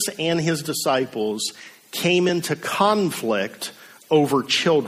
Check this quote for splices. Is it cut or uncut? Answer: uncut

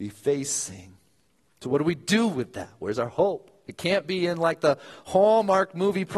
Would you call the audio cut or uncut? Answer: uncut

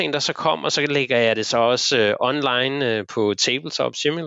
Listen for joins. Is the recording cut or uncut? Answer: uncut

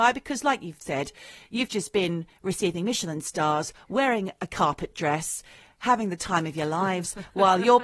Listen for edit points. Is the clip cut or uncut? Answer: uncut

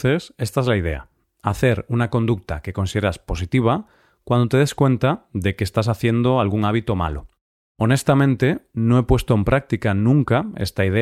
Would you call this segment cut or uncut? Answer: uncut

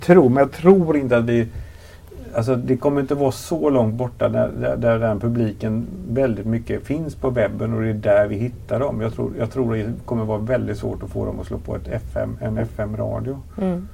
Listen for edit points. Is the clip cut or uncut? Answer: uncut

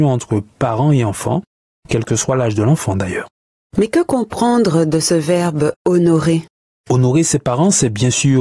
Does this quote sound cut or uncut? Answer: uncut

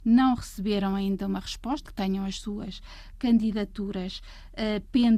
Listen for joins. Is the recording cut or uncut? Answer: cut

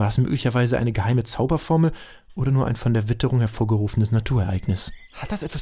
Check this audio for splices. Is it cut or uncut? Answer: uncut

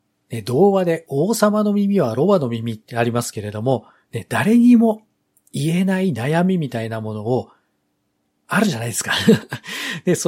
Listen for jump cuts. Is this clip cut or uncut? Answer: uncut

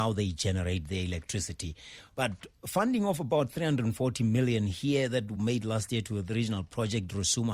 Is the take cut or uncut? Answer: uncut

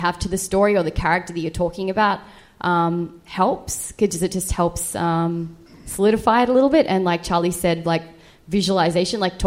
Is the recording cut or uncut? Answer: uncut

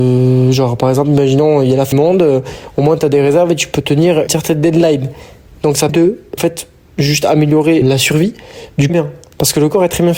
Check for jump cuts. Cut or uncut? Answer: cut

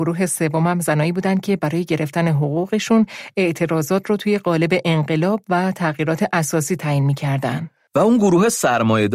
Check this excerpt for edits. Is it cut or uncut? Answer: uncut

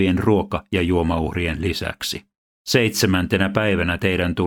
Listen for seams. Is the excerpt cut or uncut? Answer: cut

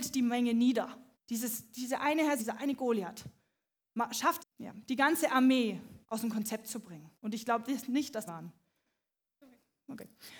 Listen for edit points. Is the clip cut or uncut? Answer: cut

